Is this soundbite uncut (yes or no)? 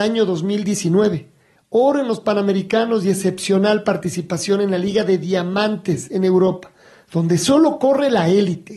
yes